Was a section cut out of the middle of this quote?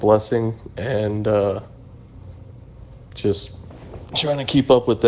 no; 0 cuts

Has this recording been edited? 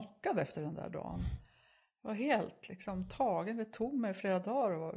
no; 0 cuts

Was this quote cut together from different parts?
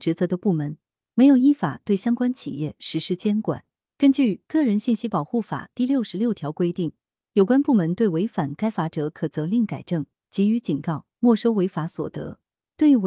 no; 0 cuts

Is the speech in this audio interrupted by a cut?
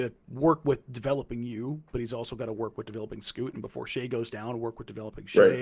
no; 0 cuts

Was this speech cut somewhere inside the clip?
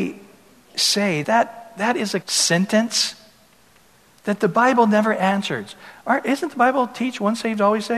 yes; 2 cuts; at 1.2 s, 2.2 s

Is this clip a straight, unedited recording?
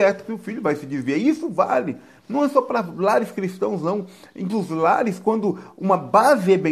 no; 1 cut; at 4.5 s

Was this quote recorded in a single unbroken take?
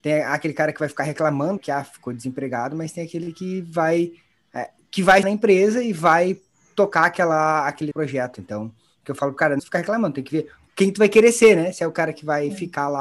no; 4 cuts; at 1.6 s, 5.2 s, 7.9 s, 9.6 s

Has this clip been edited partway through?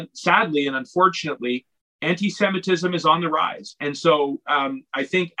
no; 0 cuts

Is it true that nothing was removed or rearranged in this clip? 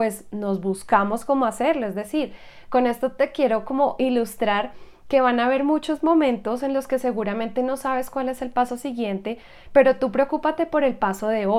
yes; 0 cuts

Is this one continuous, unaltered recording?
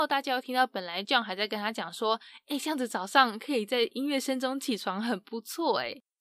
yes; 0 cuts

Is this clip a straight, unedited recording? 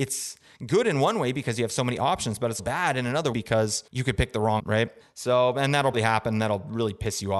no; 6 cuts; at 2.6 s, 3.3 s, 3.9 s, 4.6 s, 5.0 s, 5.9 s

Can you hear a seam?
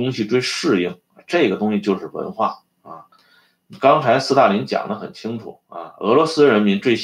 no; 0 cuts

